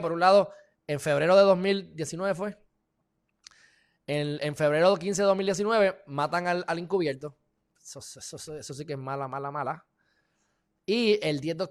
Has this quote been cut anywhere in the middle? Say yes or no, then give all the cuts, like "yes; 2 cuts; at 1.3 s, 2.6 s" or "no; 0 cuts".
no; 0 cuts